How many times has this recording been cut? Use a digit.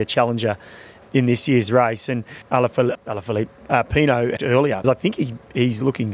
4